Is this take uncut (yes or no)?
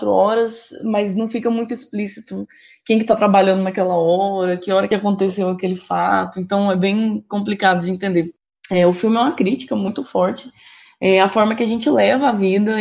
yes